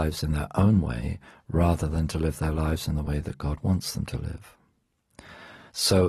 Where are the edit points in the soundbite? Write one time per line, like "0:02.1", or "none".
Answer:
none